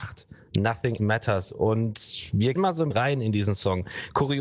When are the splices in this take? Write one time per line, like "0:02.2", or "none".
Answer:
0:01.0
0:02.6
0:02.9